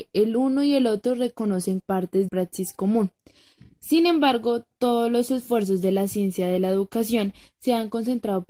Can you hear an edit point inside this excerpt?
yes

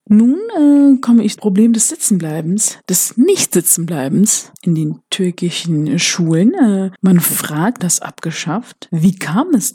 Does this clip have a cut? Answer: yes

